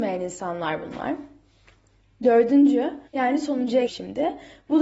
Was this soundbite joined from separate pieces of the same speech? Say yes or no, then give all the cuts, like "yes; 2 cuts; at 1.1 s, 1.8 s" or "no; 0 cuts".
yes; 2 cuts; at 3.1 s, 3.9 s